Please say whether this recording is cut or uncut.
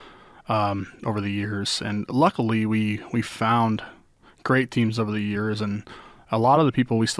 uncut